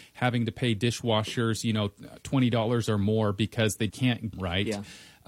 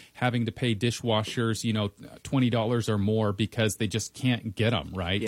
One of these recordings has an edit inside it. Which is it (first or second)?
first